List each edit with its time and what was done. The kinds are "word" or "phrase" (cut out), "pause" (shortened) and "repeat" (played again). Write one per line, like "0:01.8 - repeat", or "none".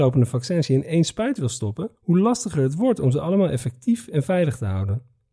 0:02.0 - pause